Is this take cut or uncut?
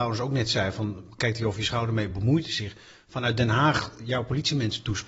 uncut